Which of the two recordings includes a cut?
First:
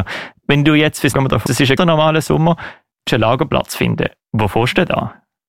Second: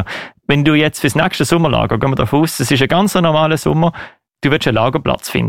first; 4 cuts; at 1.1 s, 1.5 s, 1.8 s, 3.1 s

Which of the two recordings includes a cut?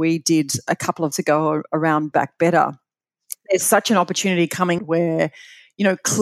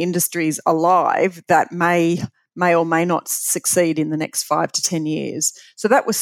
first; 3 cuts; at 1.1 s, 2.1 s, 4.8 s

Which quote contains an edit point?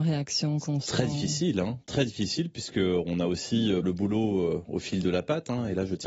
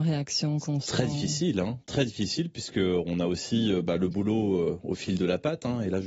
first; 1 cut; at 3.8 s

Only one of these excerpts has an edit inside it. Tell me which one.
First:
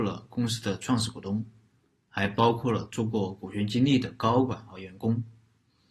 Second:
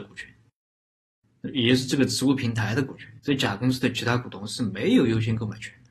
second; 1 cut; at 3.2 s

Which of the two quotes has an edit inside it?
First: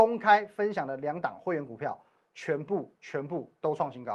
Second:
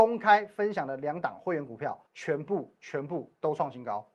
second; 1 cut; at 2.1 s

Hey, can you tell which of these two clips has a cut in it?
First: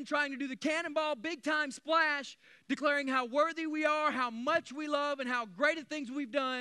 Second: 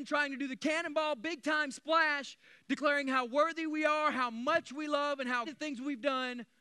second; 1 cut; at 5.4 s

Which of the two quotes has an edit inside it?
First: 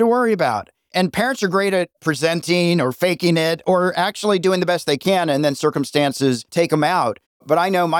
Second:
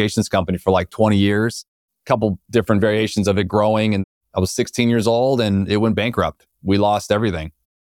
first; 1 cut; at 6.5 s

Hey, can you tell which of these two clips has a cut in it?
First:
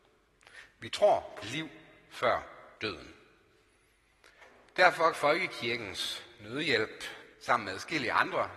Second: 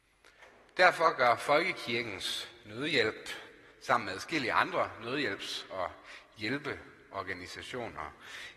first; 4 cuts; at 1.4 s, 2.7 s, 5.1 s, 7.3 s

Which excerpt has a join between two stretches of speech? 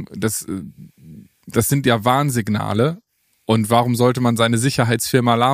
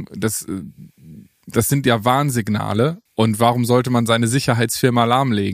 second; 1 cut; at 3.1 s

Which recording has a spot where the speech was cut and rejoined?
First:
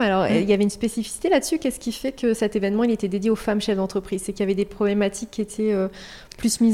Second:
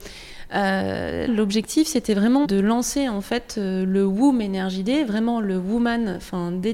second; 2 cuts; at 1.3 s, 2.4 s

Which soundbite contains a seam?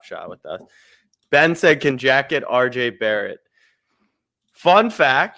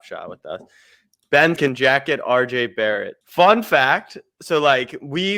second; 2 cuts; at 1.6 s, 3.2 s

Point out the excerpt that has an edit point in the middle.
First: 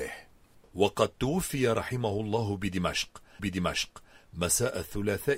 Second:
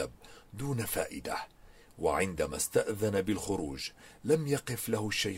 first; 1 cut; at 3.4 s

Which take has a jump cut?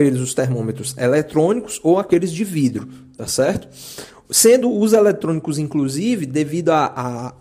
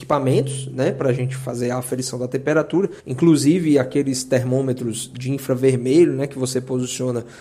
second; 1 cut; at 3.0 s

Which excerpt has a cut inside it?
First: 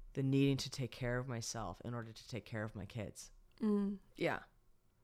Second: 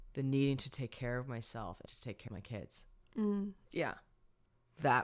second; 2 cuts; at 1.9 s, 2.3 s

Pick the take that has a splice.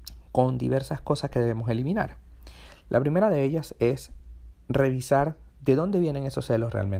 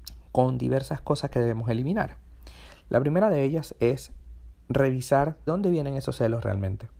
second; 1 cut; at 5.5 s

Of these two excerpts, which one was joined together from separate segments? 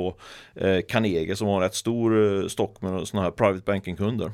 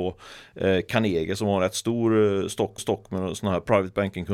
second; 1 cut; at 2.8 s

